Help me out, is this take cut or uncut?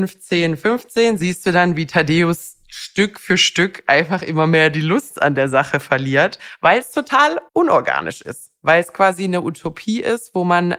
cut